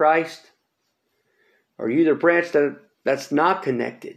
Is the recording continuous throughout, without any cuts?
yes; 0 cuts

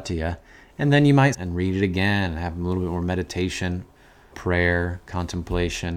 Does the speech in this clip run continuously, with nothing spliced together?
no; 2 cuts; at 1.3 s, 4.3 s

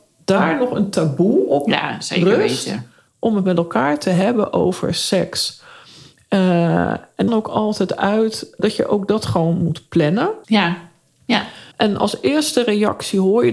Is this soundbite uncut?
no; 4 cuts; at 7.3 s, 8.6 s, 10.4 s, 11.7 s

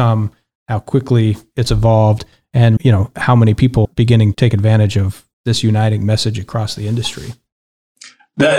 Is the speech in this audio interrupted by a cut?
yes; 3 cuts; at 2.8 s, 3.8 s, 4.3 s

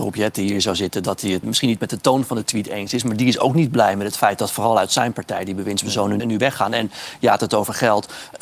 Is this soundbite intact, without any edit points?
no; 2 cuts; at 1.4 s, 6.2 s

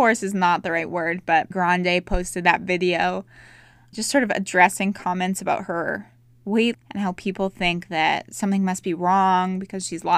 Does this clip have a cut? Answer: yes; 3 cuts; at 1.5 s, 3.9 s, 6.7 s

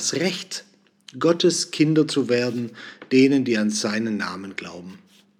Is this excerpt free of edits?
yes; 0 cuts

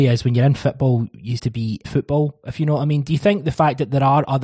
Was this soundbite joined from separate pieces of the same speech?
yes; 2 cuts; at 1.4 s, 1.8 s

